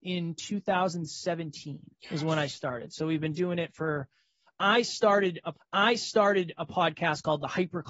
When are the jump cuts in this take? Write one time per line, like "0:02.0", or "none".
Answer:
0:01.9
0:05.5